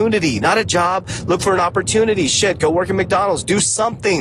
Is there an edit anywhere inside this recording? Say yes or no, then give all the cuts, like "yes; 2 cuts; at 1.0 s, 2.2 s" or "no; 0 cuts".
no; 0 cuts